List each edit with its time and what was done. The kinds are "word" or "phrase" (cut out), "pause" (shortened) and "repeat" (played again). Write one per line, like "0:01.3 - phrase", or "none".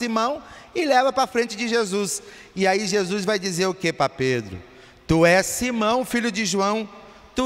none

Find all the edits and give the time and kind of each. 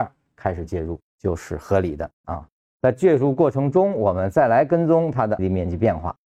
0:01.1 - pause
0:02.1 - pause
0:05.4 - word

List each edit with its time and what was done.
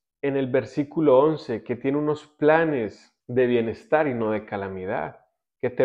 0:03.2 - pause

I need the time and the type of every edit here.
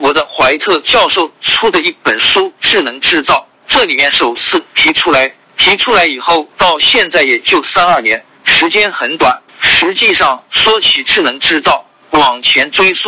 0:06.5 - pause
0:09.5 - pause

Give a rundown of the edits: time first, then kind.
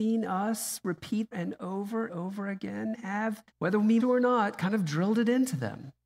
0:01.3 - phrase
0:02.1 - word
0:02.9 - phrase
0:03.5 - pause
0:04.0 - word

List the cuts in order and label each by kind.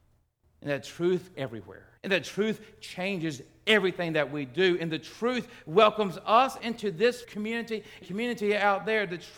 0:01.3 - word
0:02.0 - pause
0:06.6 - phrase
0:07.2 - word
0:08.0 - word

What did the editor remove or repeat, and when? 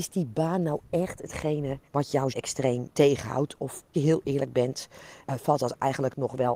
0:01.8 - pause
0:02.3 - word
0:02.9 - word
0:03.9 - word
0:05.2 - word

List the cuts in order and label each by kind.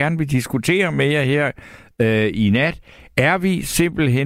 none

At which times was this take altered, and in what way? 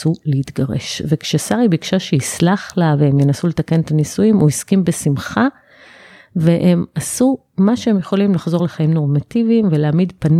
none

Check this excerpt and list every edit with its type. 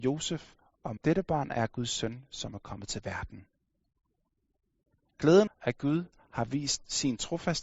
0:01.0 - word
0:05.5 - word

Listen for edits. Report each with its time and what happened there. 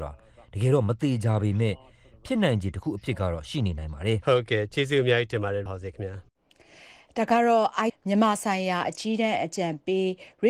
0:05.7 - word
0:07.9 - word

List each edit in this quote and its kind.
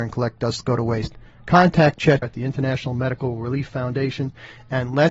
0:02.2 - word

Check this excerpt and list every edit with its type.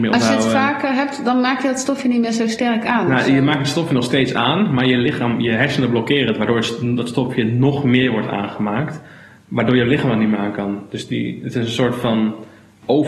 none

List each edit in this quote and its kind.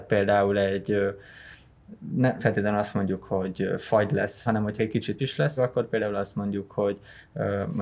0:02.4 - word
0:04.5 - word
0:04.8 - word
0:05.2 - word
0:05.6 - phrase

